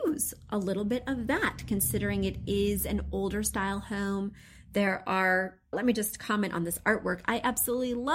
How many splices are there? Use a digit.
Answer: 1